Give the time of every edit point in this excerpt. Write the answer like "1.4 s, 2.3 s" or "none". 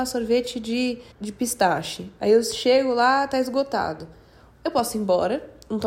1.1 s